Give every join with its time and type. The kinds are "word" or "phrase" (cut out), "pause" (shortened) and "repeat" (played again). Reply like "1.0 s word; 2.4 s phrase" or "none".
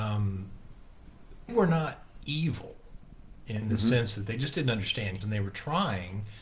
1.5 s word; 3.6 s word; 5.2 s word